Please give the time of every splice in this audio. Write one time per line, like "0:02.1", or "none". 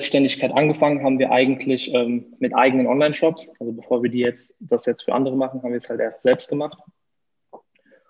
none

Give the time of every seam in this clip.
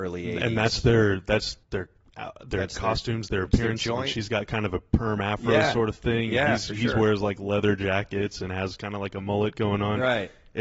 0:01.6

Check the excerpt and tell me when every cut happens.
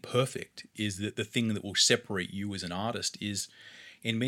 none

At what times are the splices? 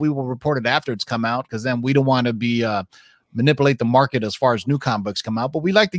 none

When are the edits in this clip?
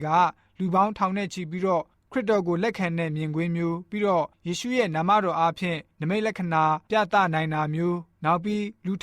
0:04.3

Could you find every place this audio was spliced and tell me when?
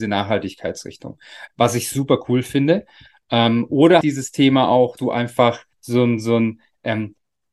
0:01.5
0:04.0
0:05.0
0:05.7

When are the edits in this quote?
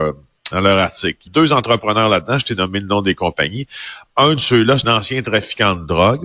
0:01.3
0:04.8

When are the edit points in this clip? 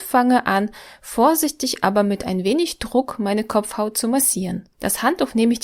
0:04.7

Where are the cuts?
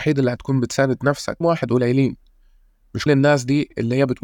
0:01.4
0:03.1

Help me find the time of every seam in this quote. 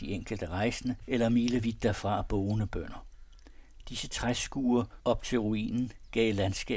none

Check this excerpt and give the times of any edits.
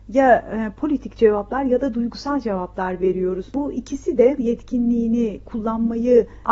0:04.4

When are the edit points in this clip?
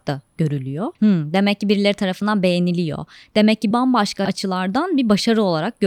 0:03.7

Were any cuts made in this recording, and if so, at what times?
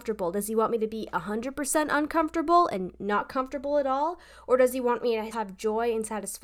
0:05.3

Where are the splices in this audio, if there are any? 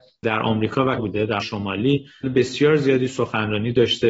0:01.0
0:01.4
0:02.2

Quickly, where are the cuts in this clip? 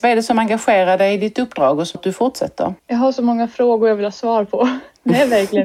0:02.0
0:02.8

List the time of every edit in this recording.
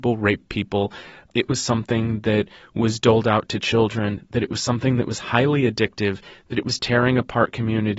none

